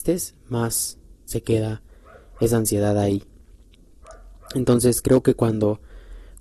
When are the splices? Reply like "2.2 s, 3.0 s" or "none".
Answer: none